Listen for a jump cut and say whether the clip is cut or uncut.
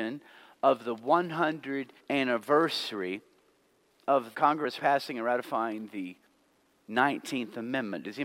cut